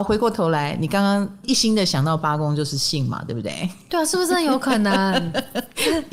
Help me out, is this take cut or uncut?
uncut